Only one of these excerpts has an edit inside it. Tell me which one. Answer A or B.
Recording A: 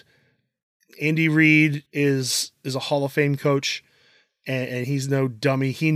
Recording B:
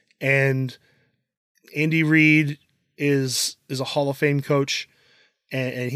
A